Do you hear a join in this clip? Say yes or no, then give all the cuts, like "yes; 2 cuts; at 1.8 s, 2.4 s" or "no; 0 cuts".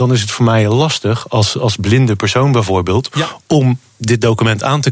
no; 0 cuts